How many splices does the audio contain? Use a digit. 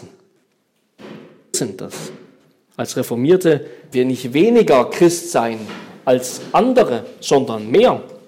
2